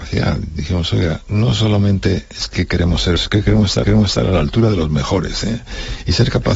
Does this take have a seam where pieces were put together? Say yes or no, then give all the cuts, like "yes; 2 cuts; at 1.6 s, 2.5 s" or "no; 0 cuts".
yes; 2 cuts; at 3.2 s, 3.8 s